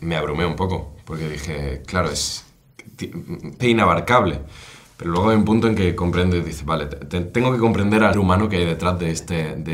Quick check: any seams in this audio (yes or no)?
yes